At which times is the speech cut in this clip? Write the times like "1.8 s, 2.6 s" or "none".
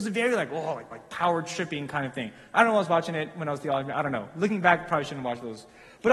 0.9 s